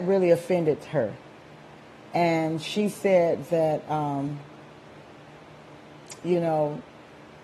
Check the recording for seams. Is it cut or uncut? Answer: uncut